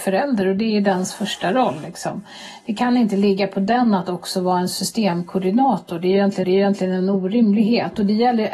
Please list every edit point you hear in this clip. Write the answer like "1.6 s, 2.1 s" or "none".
6.4 s